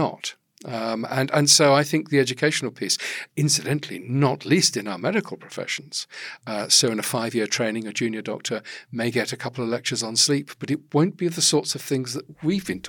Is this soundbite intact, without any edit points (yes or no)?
no